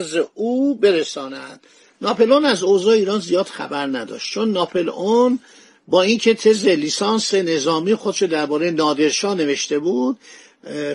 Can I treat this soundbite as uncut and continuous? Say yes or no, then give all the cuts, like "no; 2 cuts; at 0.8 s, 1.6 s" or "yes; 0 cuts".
yes; 0 cuts